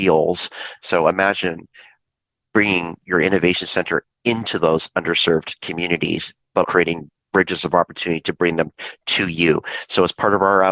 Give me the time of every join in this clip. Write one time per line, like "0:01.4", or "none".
0:06.6